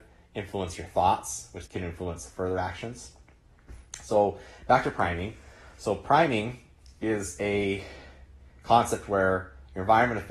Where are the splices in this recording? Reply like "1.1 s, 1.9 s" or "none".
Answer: 1.7 s